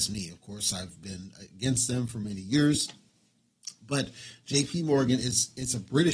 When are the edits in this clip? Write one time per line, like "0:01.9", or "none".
none